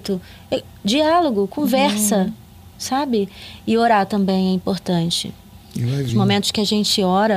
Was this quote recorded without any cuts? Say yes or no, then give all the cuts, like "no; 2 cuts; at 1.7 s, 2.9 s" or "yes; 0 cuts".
yes; 0 cuts